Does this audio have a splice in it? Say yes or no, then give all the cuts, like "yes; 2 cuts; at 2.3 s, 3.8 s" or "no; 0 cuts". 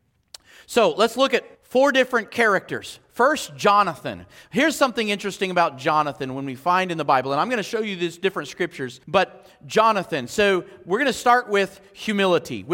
yes; 2 cuts; at 1.5 s, 9.0 s